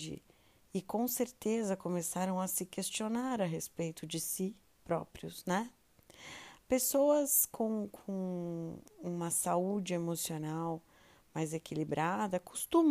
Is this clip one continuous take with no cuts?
yes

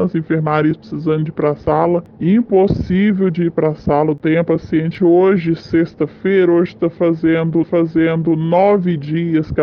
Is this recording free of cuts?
no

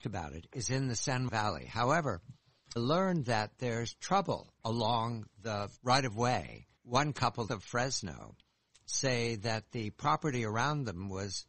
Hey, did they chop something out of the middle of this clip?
yes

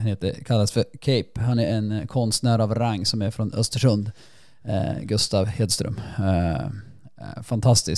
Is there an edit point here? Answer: no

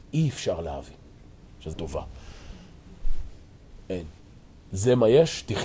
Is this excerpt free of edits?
no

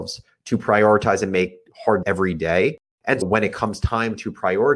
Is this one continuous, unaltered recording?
no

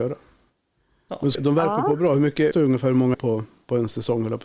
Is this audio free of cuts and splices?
no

